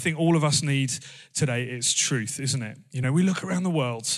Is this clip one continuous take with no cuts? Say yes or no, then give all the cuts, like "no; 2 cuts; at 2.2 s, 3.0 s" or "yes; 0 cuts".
yes; 0 cuts